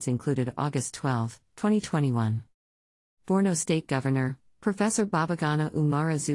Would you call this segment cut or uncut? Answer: uncut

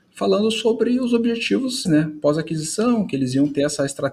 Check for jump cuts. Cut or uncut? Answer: cut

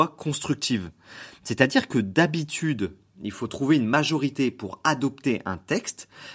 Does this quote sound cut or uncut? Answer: uncut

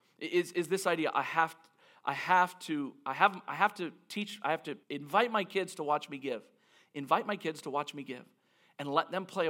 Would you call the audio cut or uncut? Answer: cut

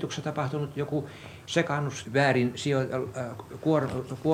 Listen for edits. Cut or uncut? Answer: cut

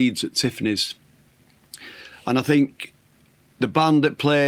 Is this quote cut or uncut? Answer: uncut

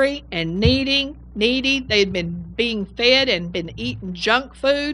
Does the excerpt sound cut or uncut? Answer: uncut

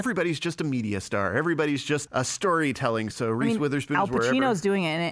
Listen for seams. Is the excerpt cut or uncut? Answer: cut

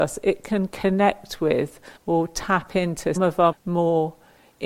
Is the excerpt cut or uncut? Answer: cut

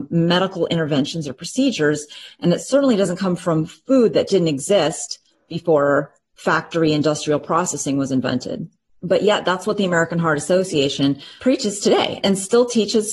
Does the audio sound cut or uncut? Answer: uncut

